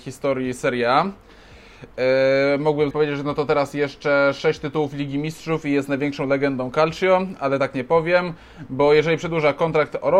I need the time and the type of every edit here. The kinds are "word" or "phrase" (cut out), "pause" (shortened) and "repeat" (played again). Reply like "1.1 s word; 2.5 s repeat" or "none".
2.9 s word

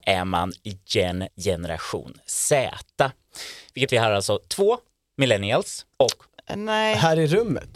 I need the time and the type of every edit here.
1.3 s word; 3.9 s phrase; 5.9 s pause

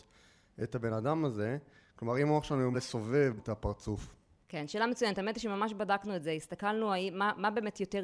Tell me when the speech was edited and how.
2.7 s word; 3.4 s word

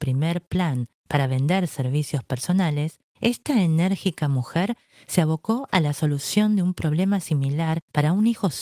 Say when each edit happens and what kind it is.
none

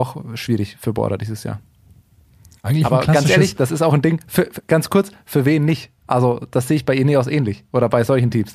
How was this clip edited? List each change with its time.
6.0 s pause

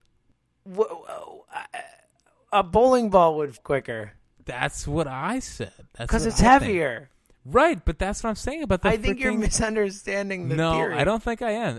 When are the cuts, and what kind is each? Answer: 3.6 s word

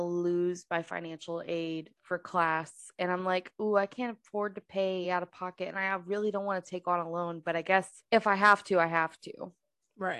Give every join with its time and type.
none

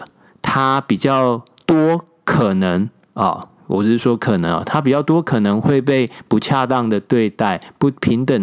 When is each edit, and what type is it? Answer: none

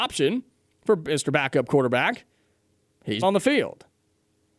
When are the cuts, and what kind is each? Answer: 3.2 s word

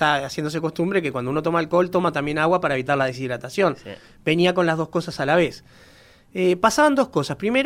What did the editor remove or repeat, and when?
none

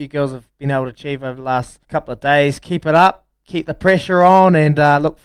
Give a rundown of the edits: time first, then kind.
1.8 s pause

